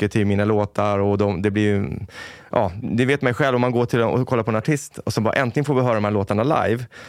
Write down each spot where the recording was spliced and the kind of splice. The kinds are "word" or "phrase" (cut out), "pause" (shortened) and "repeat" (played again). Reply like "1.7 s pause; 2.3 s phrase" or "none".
2.8 s word